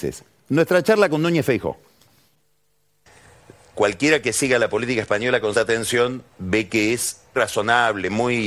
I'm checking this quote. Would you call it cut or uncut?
cut